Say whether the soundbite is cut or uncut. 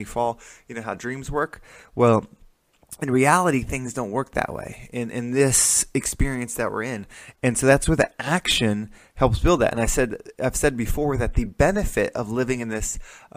uncut